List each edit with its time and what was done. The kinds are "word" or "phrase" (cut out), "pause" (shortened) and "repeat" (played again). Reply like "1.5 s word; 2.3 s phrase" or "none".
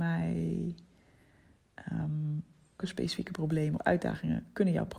2.8 s word; 3.8 s word